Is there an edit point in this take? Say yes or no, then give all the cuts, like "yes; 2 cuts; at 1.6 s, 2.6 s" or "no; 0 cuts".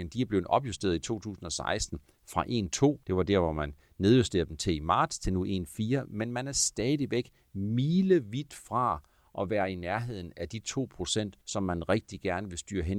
yes; 2 cuts; at 3.0 s, 11.4 s